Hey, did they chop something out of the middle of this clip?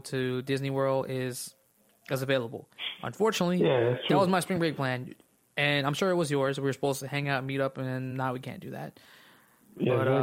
no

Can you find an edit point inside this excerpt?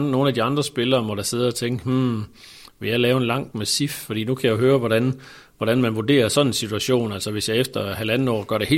yes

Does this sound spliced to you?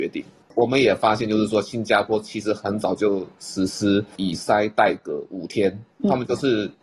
yes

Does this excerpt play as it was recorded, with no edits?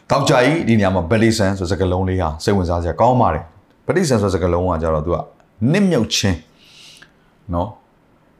yes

